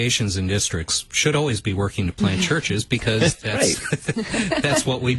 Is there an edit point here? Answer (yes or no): no